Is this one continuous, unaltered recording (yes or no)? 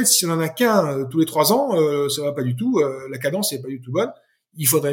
yes